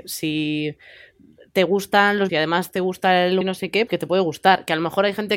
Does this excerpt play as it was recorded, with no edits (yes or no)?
no